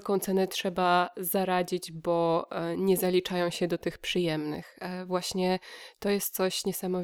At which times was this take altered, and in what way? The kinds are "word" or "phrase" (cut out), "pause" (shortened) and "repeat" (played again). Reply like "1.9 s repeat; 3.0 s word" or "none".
none